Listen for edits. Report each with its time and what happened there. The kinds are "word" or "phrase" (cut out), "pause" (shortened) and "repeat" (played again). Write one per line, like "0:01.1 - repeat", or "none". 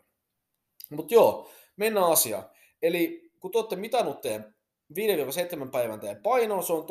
none